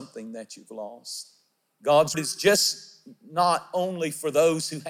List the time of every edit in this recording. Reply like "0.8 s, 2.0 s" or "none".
2.1 s